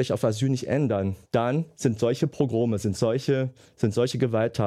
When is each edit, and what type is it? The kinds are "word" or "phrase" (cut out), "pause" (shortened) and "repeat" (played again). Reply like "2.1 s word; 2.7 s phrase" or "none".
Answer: 1.2 s pause